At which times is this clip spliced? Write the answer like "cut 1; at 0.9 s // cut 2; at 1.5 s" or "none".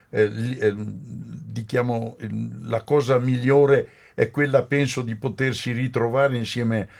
none